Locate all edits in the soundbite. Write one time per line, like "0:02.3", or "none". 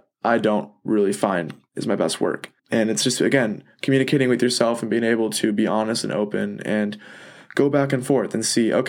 0:02.6